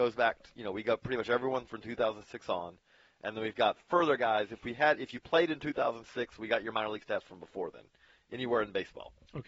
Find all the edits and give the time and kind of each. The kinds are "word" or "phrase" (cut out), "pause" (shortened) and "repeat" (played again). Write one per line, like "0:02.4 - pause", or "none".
none

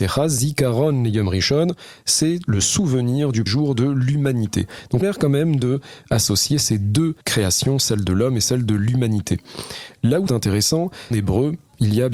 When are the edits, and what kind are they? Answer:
0:03.5 - word
0:05.0 - phrase
0:06.0 - word
0:07.2 - pause
0:10.3 - word
0:11.1 - phrase

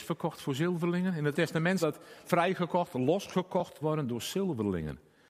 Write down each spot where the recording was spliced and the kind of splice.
0:01.3 - word
0:01.8 - word
0:02.2 - word
0:03.8 - word

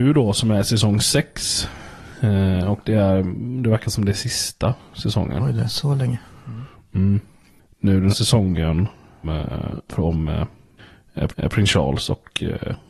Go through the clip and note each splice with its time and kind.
0:08.1 - word
0:09.2 - phrase
0:09.9 - word
0:11.3 - repeat

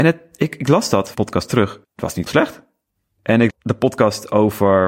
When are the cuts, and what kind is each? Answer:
0:01.1 - phrase
0:01.8 - pause
0:02.3 - word
0:03.5 - phrase

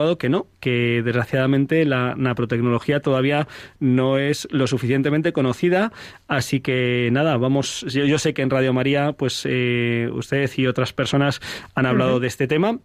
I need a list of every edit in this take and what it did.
none

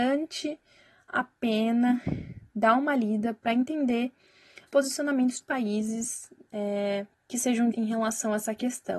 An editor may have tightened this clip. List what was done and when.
0:04.7 - word
0:05.4 - word
0:07.1 - pause
0:07.7 - word

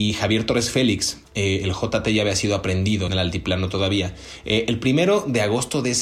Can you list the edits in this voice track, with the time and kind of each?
0:01.2 - pause
0:03.1 - phrase

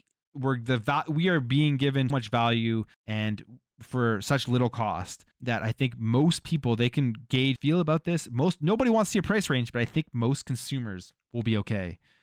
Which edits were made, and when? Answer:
0:02.1 - word
0:02.9 - pause
0:05.3 - pause
0:07.6 - phrase
0:11.2 - pause

